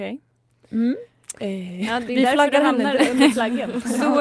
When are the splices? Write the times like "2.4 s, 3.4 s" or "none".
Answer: none